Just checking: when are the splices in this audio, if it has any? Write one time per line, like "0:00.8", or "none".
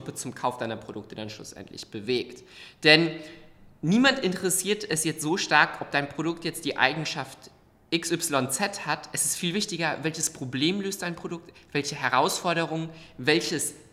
none